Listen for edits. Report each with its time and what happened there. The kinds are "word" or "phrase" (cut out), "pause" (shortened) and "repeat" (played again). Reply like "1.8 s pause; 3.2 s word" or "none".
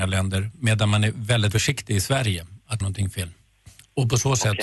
1.5 s word; 2.8 s phrase